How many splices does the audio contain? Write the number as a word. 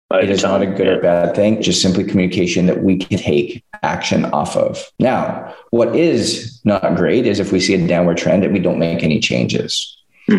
three